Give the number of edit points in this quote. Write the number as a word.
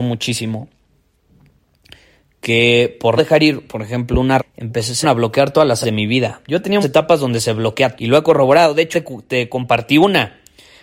seven